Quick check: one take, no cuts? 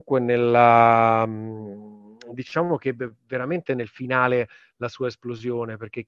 yes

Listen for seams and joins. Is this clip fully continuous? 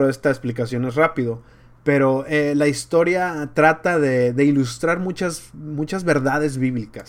yes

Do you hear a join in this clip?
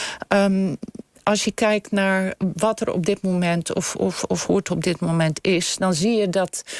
no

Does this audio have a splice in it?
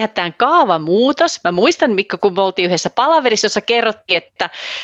no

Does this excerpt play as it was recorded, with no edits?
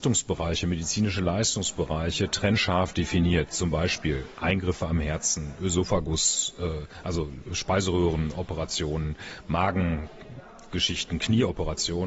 yes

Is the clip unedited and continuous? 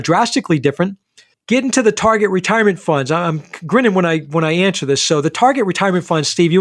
yes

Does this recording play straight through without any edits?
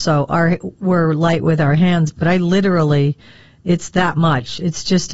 yes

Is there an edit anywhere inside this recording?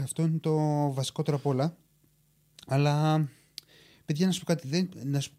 no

